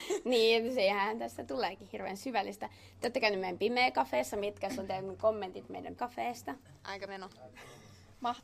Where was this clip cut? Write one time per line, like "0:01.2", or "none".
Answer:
0:06.0
0:07.1